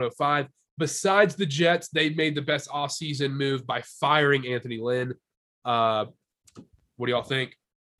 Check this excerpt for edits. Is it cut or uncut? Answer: uncut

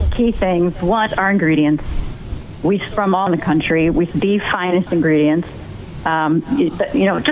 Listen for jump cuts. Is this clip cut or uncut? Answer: cut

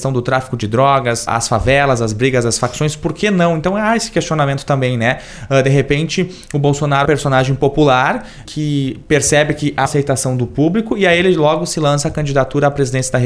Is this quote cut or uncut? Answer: cut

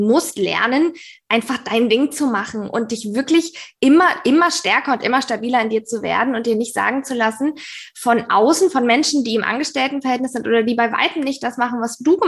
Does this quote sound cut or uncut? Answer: uncut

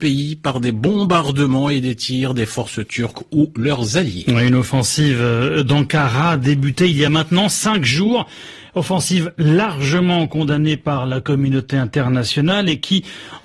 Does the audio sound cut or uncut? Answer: uncut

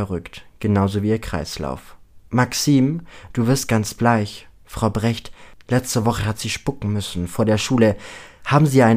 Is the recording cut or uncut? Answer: uncut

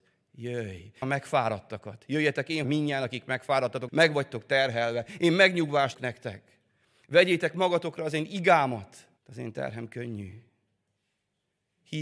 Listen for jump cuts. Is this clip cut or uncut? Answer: cut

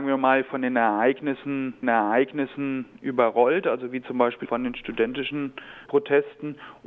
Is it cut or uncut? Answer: cut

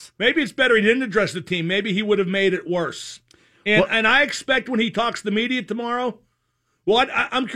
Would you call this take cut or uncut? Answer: uncut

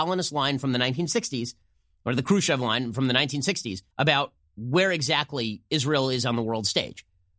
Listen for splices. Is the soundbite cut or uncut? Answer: cut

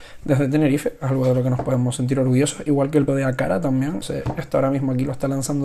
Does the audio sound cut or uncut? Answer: cut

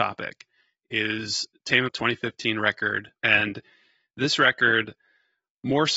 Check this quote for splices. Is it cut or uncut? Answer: cut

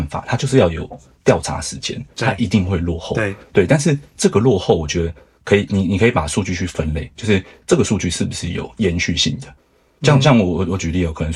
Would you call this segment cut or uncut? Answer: uncut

